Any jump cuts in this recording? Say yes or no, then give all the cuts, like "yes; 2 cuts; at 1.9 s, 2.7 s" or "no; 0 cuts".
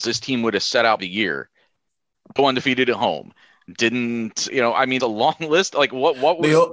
yes; 4 cuts; at 1.0 s, 2.4 s, 4.5 s, 5.0 s